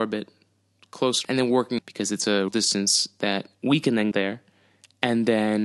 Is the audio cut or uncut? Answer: cut